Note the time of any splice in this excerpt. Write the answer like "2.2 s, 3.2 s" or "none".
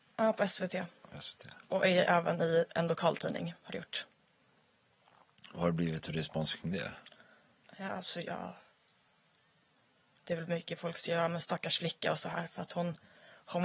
none